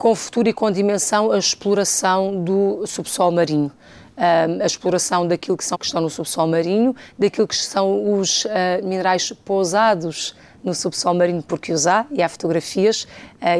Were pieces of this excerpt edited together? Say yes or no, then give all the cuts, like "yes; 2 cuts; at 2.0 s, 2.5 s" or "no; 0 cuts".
yes; 1 cut; at 5.7 s